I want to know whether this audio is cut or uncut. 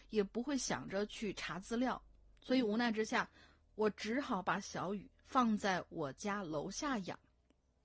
uncut